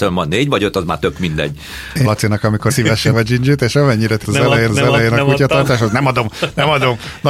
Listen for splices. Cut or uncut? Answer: cut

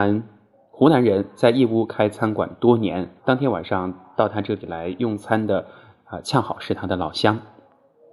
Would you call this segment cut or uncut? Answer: cut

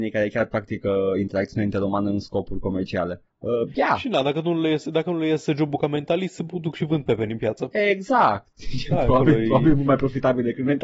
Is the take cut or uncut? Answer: uncut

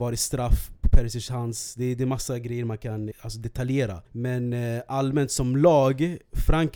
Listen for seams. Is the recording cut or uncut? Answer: cut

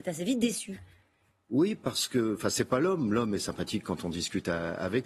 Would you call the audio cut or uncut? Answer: uncut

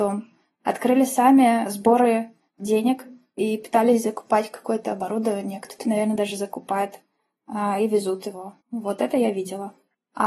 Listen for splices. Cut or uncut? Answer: cut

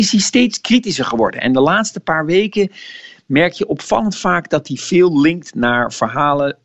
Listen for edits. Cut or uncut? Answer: uncut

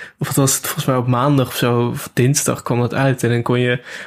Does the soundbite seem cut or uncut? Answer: uncut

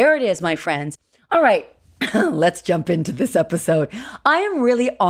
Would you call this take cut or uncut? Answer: uncut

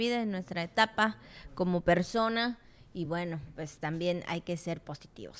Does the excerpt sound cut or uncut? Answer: uncut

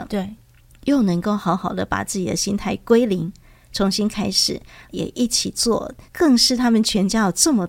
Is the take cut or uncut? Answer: cut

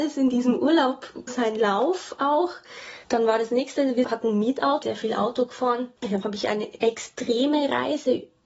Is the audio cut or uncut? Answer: cut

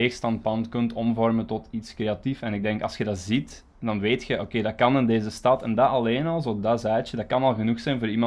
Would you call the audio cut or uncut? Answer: uncut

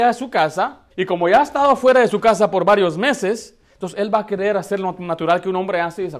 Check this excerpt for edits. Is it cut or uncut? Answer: cut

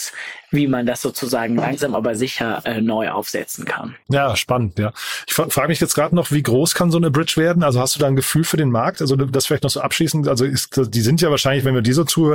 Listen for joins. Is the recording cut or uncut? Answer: cut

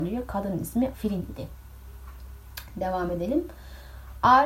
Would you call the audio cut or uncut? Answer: cut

